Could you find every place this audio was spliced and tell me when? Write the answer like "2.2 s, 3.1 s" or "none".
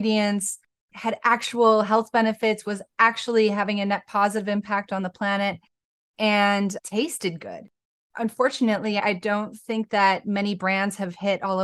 none